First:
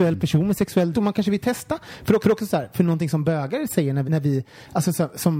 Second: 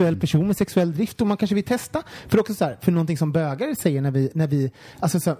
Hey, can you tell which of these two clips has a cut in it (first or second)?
first